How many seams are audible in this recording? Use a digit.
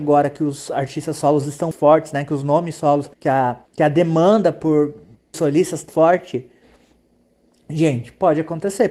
5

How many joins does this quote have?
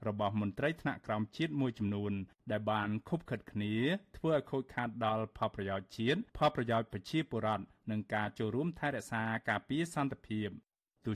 1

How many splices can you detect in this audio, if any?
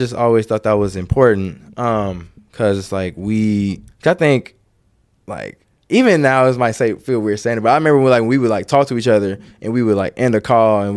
2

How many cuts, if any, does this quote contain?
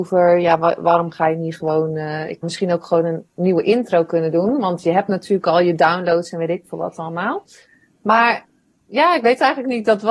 1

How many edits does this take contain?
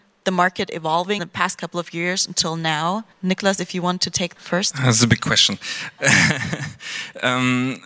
3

